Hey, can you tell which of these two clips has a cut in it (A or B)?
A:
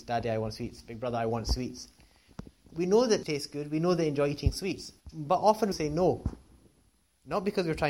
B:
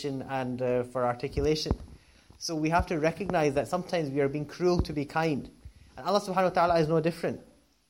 A